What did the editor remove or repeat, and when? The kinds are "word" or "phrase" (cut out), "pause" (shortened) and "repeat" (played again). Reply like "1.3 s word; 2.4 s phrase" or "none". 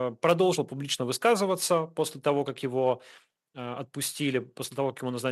none